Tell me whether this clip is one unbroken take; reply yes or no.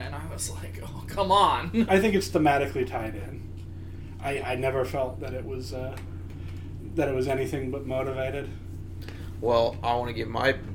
no